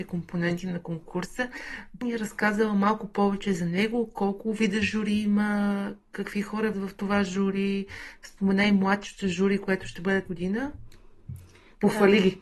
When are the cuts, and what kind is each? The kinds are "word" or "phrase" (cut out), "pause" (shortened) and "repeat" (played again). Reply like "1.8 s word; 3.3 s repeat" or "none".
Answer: 2.0 s word; 6.7 s word; 10.3 s word

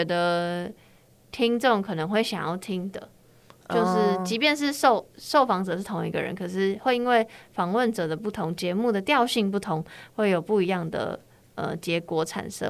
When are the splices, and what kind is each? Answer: none

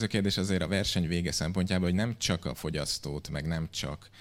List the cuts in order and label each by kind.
none

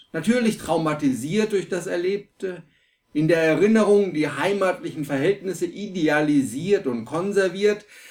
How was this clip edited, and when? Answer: none

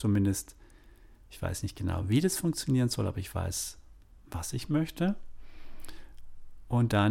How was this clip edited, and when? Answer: none

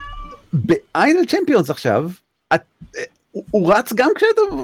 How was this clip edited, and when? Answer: 2.2 s pause

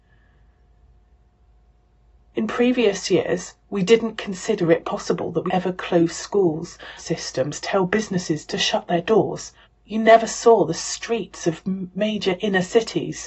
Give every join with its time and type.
5.5 s word; 7.0 s phrase; 9.6 s pause

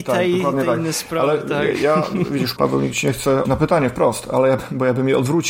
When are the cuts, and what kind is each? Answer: 2.6 s word; 3.4 s word

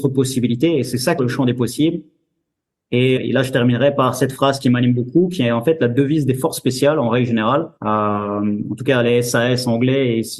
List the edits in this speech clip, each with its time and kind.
1.2 s phrase; 3.2 s word; 7.8 s pause

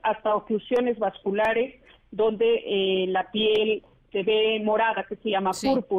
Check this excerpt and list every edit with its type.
none

